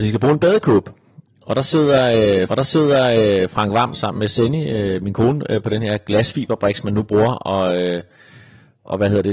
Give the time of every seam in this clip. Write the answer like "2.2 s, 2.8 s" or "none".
2.5 s, 3.9 s